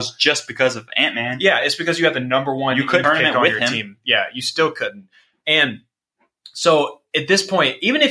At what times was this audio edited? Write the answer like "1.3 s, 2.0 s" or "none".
3.0 s

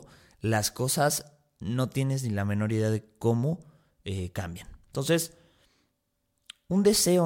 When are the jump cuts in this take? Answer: none

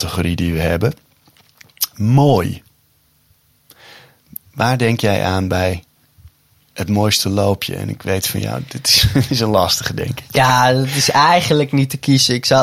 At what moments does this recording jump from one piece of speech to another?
none

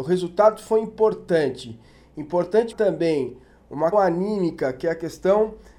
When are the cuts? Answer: 2.7 s, 3.9 s

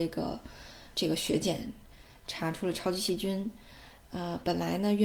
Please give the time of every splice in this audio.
0.9 s, 4.0 s

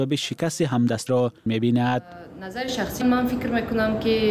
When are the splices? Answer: 1.1 s, 1.5 s, 3.0 s

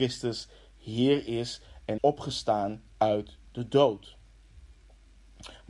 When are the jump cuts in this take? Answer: 2.0 s, 2.9 s

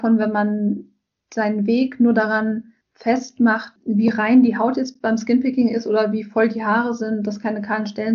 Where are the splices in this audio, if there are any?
2.8 s

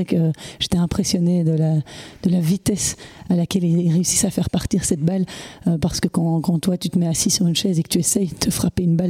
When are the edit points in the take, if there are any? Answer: none

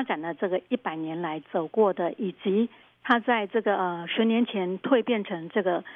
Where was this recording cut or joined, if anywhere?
none

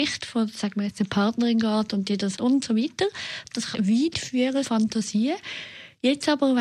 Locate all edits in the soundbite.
2.4 s, 3.7 s, 4.6 s

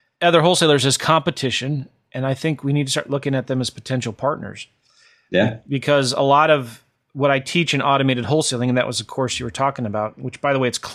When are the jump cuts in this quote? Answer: none

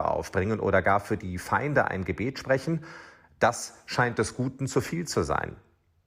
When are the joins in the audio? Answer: none

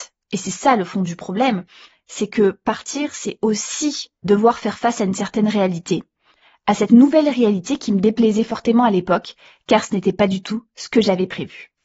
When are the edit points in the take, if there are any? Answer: 4.2 s

